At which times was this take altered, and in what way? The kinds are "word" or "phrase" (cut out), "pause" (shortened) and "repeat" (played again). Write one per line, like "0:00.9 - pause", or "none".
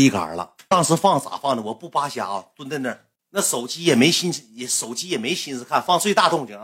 none